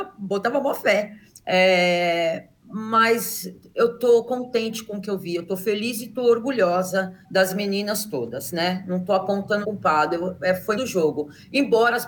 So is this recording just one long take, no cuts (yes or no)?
no